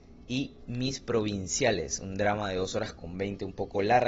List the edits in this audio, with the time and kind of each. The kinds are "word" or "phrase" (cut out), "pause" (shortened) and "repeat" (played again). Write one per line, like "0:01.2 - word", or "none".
none